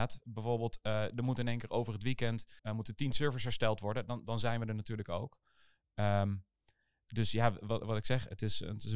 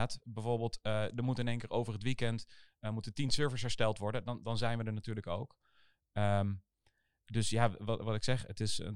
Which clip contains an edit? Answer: first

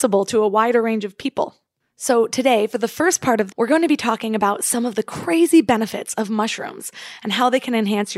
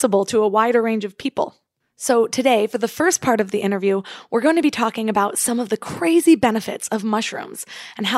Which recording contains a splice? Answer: first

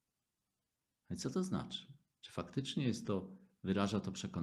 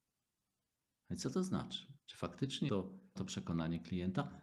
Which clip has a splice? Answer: second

